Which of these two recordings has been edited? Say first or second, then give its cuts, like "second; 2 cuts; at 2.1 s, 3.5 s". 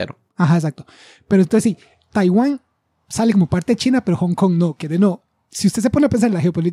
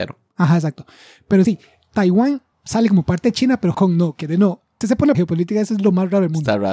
second; 5 cuts; at 1.4 s, 2.5 s, 3.7 s, 4.8 s, 5.1 s